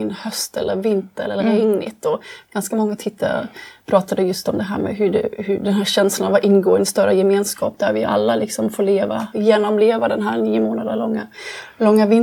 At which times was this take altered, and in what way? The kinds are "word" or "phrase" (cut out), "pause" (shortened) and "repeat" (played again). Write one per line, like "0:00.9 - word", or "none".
none